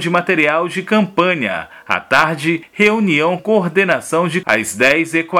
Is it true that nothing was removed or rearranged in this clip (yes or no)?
no